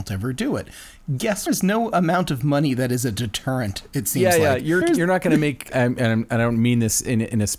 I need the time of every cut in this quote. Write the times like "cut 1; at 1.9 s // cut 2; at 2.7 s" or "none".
cut 1; at 1.5 s // cut 2; at 4.8 s